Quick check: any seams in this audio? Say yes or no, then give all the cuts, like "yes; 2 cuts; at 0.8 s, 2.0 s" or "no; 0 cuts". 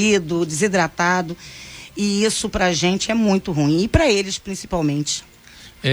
no; 0 cuts